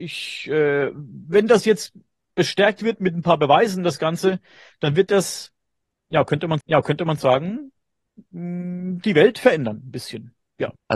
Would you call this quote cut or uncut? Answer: cut